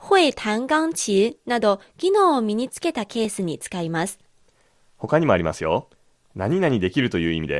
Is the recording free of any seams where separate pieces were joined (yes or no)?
yes